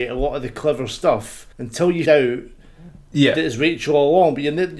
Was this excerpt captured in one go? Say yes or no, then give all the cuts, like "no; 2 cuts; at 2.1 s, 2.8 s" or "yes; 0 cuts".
no; 2 cuts; at 1.5 s, 2.1 s